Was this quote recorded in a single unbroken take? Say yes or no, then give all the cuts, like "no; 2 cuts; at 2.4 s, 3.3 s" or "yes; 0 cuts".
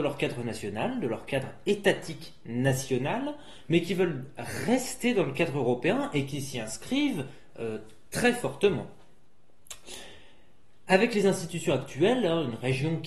yes; 0 cuts